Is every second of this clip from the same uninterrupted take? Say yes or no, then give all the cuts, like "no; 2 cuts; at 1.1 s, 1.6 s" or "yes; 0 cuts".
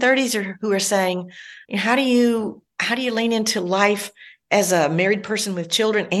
no; 1 cut; at 1.6 s